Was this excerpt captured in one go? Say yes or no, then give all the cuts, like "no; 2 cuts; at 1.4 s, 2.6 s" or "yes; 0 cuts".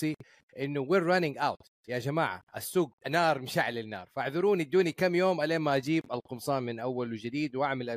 no; 1 cut; at 3.0 s